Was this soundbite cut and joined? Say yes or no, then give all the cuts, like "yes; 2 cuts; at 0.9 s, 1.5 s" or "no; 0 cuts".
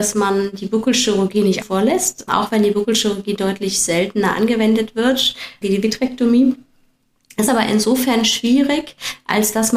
yes; 4 cuts; at 1.6 s, 2.3 s, 5.6 s, 7.5 s